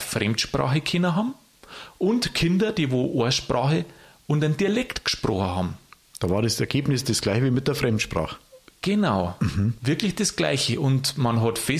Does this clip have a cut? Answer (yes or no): no